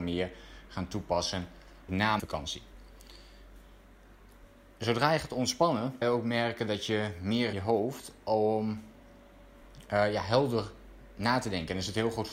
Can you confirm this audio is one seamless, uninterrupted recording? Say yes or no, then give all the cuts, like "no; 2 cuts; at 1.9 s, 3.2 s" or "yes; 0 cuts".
no; 4 cuts; at 1.9 s, 2.2 s, 6.0 s, 7.5 s